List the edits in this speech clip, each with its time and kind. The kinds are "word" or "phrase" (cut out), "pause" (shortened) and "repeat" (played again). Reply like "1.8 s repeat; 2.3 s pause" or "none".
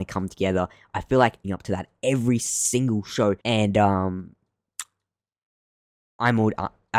1.4 s phrase; 3.4 s pause